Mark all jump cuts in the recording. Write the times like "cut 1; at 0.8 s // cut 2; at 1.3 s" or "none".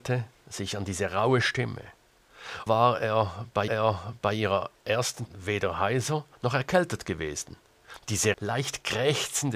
cut 1; at 2.7 s // cut 2; at 3.7 s // cut 3; at 5.3 s // cut 4; at 6.3 s // cut 5; at 8.3 s

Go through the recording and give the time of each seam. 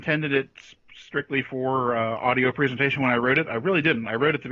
none

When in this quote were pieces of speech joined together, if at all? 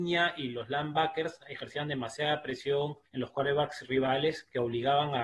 cut 1; at 3.1 s

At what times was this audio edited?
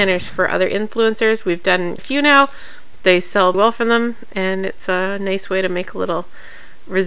cut 1; at 2.0 s // cut 2; at 3.5 s

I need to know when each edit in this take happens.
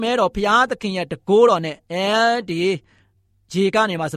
cut 1; at 1.8 s

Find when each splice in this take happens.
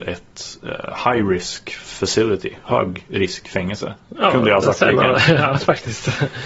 none

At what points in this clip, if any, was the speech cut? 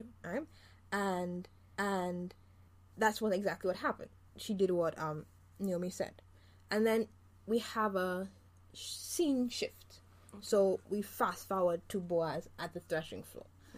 cut 1; at 1.8 s

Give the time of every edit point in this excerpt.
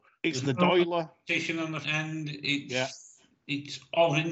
cut 1; at 1.8 s

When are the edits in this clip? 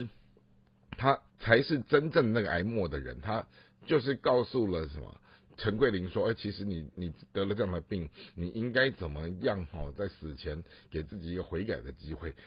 cut 1; at 1.3 s

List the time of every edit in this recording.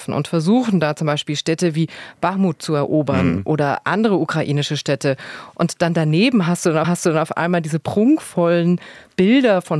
cut 1; at 6.8 s

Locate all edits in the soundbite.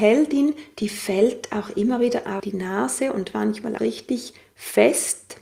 cut 1; at 2.4 s // cut 2; at 3.8 s

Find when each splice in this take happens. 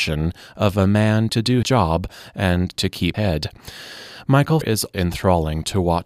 cut 1; at 1.3 s // cut 2; at 1.6 s // cut 3; at 2.8 s // cut 4; at 3.1 s // cut 5; at 4.6 s // cut 6; at 4.9 s

